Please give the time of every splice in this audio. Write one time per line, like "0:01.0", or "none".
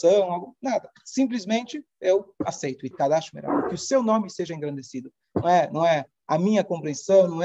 0:02.9